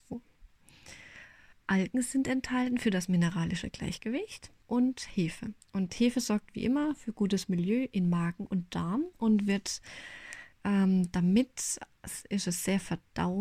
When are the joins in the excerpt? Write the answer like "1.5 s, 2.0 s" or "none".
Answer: 1.5 s, 4.6 s, 9.1 s, 10.5 s